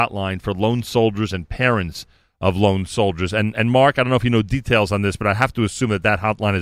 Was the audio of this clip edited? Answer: no; 0 cuts

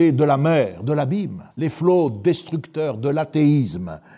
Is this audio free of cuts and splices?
no; 1 cut; at 1.5 s

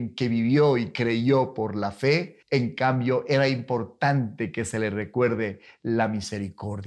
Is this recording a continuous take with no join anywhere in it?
no; 1 cut; at 2.4 s

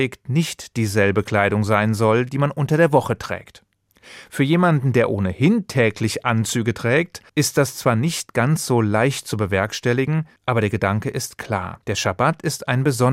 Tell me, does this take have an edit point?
yes; 3 cuts; at 7.3 s, 10.4 s, 11.8 s

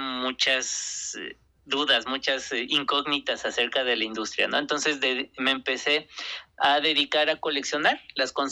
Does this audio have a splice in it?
yes; 1 cut; at 1.5 s

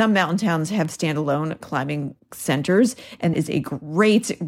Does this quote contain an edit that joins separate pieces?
yes; 1 cut; at 3.3 s

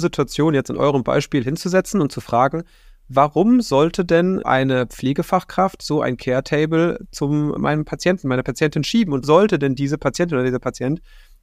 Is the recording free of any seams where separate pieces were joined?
no; 3 cuts; at 4.4 s, 7.6 s, 9.2 s

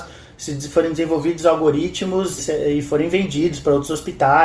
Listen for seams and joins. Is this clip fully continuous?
no; 1 cut; at 2.4 s

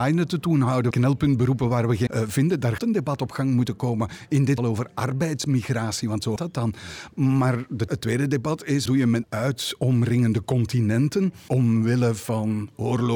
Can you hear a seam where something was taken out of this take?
yes; 9 cuts; at 0.9 s, 2.1 s, 2.8 s, 4.6 s, 6.4 s, 7.9 s, 8.9 s, 9.2 s, 11.5 s

